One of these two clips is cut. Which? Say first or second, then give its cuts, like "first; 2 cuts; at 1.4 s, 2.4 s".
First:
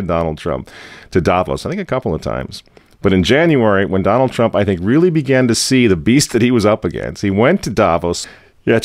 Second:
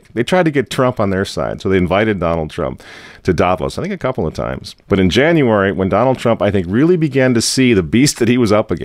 second; 1 cut; at 4.8 s